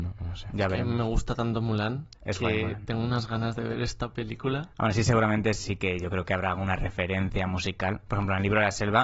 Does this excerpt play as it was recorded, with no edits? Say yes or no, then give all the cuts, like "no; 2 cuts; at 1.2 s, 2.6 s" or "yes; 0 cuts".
no; 1 cut; at 2.1 s